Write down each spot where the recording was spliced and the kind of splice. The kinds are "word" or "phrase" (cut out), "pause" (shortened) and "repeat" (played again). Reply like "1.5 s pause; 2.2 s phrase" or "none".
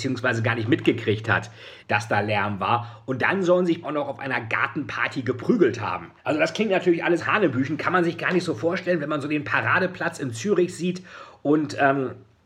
1.8 s word; 3.8 s word; 6.2 s pause; 7.2 s word

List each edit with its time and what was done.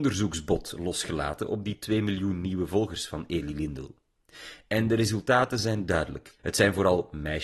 6.4 s pause

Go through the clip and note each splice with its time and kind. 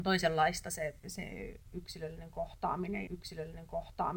3.1 s repeat

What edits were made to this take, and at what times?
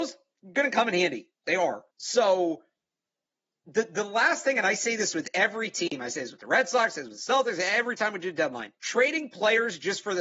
1.9 s pause; 8.8 s pause

